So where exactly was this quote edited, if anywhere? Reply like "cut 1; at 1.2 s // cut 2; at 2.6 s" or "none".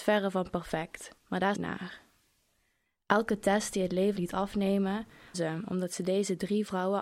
cut 1; at 1.2 s // cut 2; at 1.5 s // cut 3; at 4.2 s // cut 4; at 5.3 s